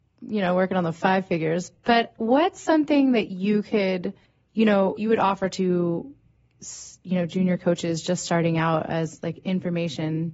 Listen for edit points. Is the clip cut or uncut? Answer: cut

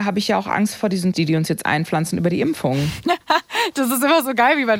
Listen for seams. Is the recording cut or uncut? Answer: cut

